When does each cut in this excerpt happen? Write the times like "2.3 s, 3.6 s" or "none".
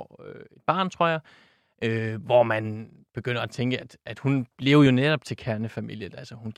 none